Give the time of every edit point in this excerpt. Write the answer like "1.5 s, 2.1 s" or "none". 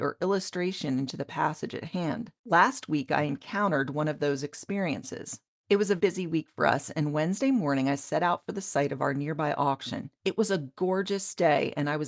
2.4 s, 5.5 s, 6.0 s, 10.1 s